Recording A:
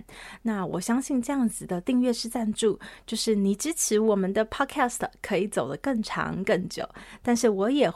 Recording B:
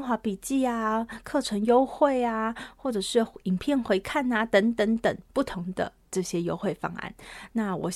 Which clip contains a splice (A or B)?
B